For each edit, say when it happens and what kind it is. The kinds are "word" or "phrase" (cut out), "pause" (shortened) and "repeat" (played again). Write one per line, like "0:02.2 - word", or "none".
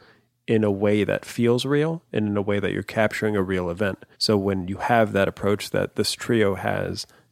0:04.1 - pause